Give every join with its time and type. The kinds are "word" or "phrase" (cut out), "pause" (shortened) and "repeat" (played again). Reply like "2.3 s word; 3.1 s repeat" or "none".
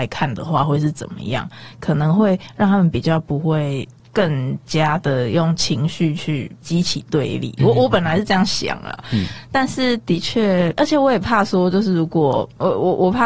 none